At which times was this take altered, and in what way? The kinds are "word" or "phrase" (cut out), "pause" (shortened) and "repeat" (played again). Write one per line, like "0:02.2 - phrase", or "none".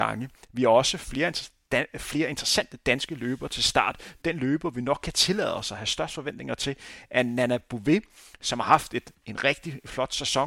none